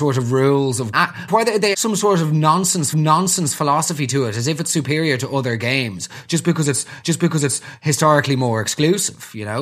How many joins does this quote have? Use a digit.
5